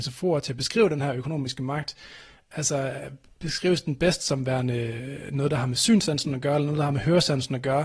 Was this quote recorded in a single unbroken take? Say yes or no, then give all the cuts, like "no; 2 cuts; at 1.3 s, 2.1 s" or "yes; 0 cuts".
yes; 0 cuts